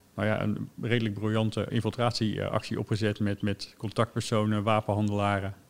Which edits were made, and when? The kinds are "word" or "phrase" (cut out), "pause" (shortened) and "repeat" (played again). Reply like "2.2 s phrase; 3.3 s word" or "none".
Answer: 1.7 s word; 3.4 s word